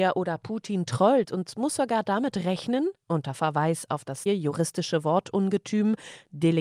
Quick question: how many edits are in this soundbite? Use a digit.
2